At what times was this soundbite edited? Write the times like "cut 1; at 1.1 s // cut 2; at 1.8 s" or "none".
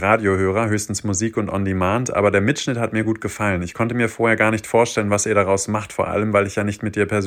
none